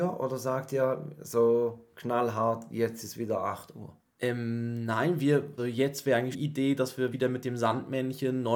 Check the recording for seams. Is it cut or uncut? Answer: cut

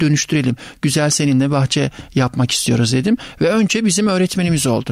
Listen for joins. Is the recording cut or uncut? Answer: uncut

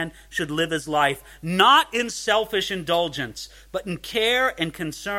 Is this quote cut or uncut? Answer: uncut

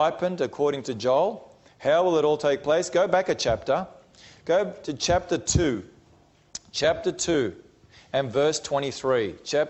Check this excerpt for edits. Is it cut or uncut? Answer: uncut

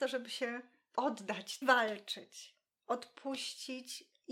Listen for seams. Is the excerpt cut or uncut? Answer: cut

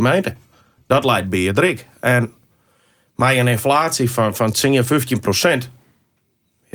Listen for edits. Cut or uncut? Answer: uncut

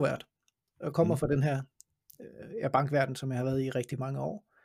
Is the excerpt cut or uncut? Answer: uncut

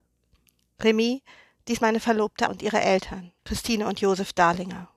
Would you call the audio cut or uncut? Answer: cut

